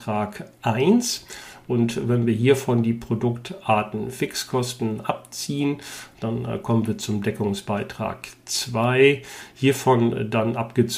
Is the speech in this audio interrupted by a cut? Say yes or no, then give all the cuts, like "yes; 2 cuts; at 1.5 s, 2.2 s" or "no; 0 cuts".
no; 0 cuts